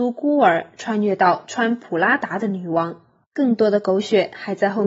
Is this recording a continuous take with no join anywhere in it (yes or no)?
no